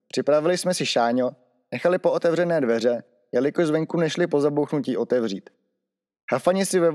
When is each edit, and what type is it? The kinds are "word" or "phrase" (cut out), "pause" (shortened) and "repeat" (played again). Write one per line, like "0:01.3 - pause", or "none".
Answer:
none